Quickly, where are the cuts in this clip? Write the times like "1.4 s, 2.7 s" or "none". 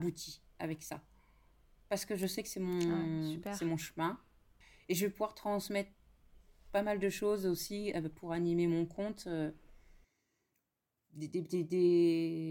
none